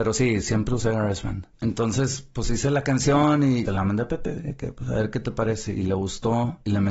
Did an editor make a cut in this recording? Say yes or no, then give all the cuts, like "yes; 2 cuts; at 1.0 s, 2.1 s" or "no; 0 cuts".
yes; 1 cut; at 3.7 s